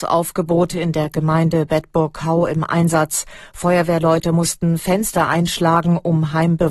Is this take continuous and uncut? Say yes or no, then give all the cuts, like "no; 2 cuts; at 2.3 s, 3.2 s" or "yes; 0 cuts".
yes; 0 cuts